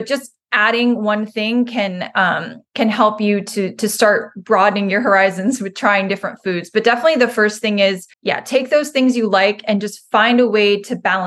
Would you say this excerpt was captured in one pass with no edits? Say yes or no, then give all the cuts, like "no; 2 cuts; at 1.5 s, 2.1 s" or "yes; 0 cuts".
no; 2 cuts; at 2.7 s, 8.1 s